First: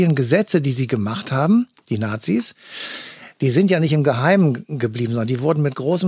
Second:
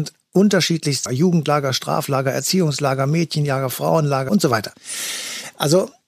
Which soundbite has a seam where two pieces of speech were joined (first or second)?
second